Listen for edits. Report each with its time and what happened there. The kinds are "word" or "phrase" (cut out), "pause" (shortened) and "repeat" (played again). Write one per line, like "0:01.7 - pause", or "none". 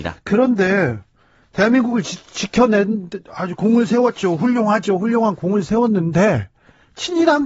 none